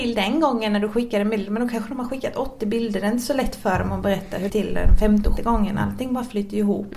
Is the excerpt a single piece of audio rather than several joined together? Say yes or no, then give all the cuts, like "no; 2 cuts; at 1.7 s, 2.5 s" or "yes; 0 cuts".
no; 2 cuts; at 4.5 s, 5.4 s